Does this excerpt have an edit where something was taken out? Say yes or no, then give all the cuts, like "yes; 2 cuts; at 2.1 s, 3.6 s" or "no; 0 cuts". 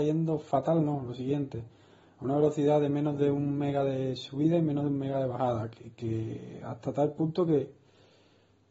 no; 0 cuts